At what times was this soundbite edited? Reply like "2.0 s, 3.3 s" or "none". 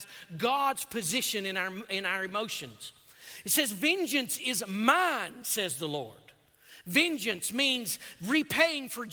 none

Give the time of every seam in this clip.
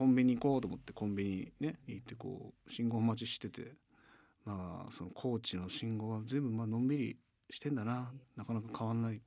1.8 s, 8.2 s

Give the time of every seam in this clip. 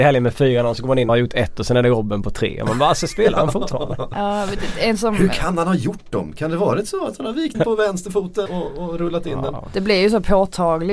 1.1 s, 7.5 s, 8.5 s

